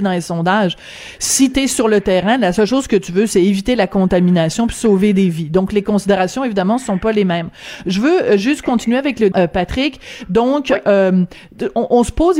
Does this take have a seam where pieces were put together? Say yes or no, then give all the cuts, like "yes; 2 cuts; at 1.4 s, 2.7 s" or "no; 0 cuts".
yes; 1 cut; at 9.3 s